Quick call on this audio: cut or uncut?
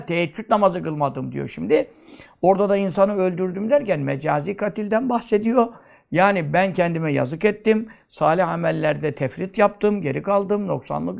uncut